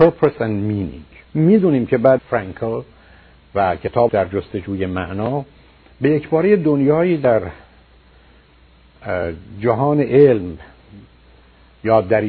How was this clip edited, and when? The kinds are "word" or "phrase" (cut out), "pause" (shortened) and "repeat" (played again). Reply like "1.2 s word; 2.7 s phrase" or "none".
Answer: 1.3 s pause; 2.2 s word; 4.1 s word